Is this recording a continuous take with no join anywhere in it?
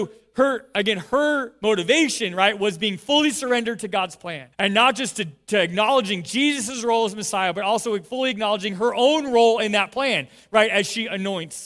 no; 1 cut; at 4.5 s

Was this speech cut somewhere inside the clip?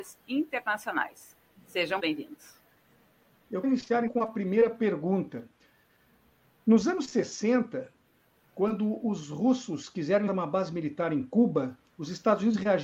yes; 4 cuts; at 2.0 s, 3.6 s, 4.1 s, 10.3 s

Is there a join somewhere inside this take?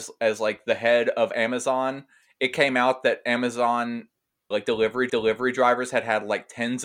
yes; 2 cuts; at 4.5 s, 5.1 s

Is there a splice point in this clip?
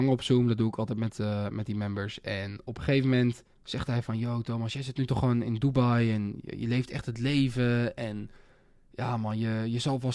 yes; 1 cut; at 3.5 s

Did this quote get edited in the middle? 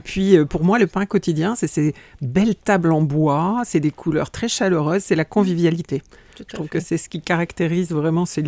no; 0 cuts

